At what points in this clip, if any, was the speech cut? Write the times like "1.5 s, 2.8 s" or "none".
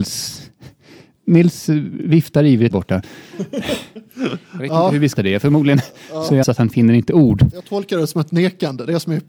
2.7 s, 5.2 s, 6.4 s